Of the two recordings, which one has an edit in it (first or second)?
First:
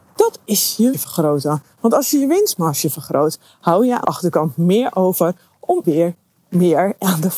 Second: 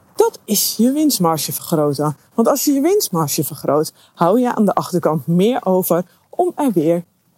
first